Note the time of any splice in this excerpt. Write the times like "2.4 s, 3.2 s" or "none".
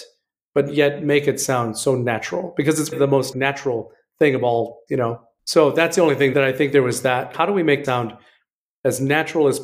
2.9 s, 3.3 s, 4.9 s, 6.3 s, 7.3 s, 7.8 s